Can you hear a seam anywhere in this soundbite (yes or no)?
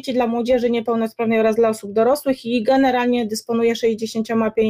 no